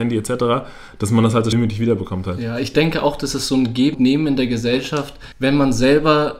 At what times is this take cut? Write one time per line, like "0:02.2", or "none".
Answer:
0:01.5
0:03.9
0:05.3